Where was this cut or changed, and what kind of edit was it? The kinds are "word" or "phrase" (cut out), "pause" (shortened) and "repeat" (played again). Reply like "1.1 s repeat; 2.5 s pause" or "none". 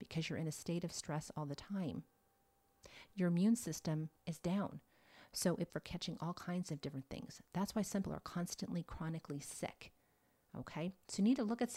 4.2 s pause; 5.7 s phrase; 8.0 s word